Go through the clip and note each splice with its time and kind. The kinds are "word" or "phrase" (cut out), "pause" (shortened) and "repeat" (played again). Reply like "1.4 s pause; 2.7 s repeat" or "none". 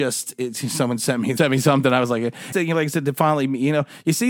1.4 s phrase; 2.5 s phrase